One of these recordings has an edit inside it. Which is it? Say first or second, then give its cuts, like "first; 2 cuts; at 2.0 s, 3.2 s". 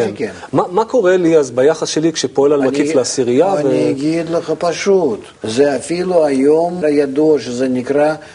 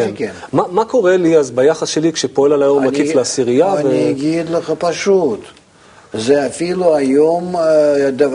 first; 3 cuts; at 2.6 s, 5.4 s, 6.8 s